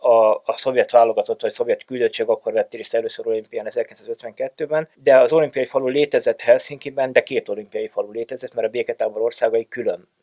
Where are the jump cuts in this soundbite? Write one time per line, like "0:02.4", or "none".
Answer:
0:04.9